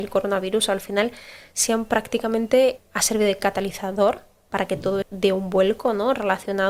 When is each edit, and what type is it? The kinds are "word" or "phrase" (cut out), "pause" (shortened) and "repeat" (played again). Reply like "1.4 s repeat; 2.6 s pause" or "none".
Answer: 2.8 s word; 5.0 s word